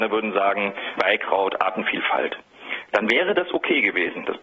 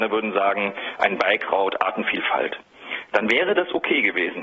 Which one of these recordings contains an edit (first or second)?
first